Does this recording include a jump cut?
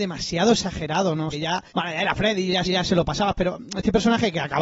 yes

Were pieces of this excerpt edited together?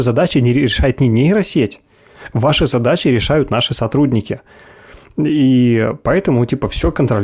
no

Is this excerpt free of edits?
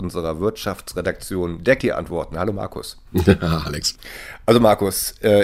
no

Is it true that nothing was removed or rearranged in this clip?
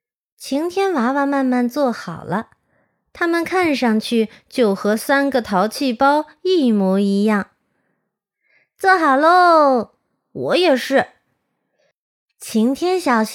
yes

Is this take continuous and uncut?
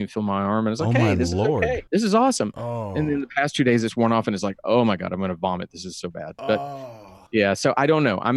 no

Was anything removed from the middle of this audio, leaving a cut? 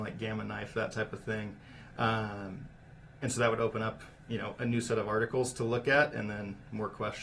yes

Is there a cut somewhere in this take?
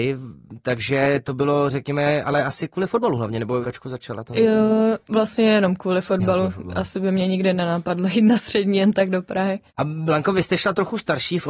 yes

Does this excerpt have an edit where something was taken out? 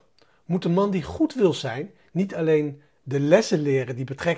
no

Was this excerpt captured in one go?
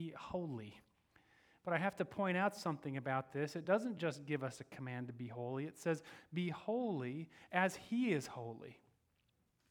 yes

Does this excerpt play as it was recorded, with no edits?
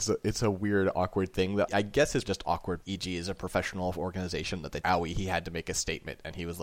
no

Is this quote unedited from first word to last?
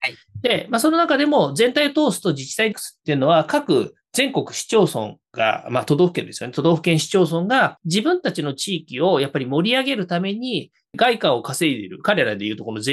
no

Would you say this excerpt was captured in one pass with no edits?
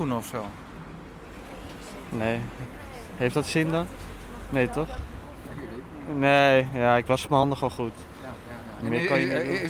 yes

